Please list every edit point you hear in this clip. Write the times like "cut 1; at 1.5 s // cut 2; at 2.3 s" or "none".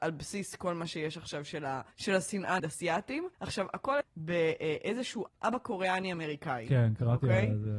cut 1; at 1.9 s // cut 2; at 2.6 s // cut 3; at 3.3 s // cut 4; at 4.0 s // cut 5; at 5.3 s